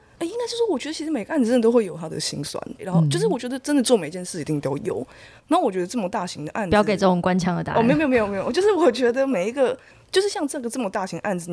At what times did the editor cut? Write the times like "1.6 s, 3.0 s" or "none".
2.8 s